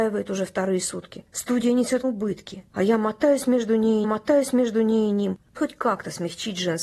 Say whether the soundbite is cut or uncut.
cut